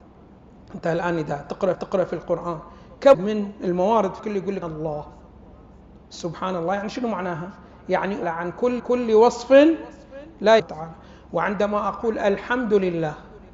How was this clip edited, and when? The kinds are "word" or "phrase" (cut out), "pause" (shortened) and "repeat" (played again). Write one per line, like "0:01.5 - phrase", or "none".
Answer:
0:01.7 - repeat
0:03.1 - word
0:04.2 - word
0:04.6 - word
0:06.0 - pause
0:08.2 - phrase
0:08.8 - repeat
0:10.6 - phrase

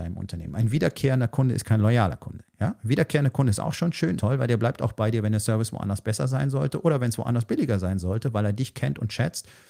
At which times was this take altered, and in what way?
0:04.2 - phrase

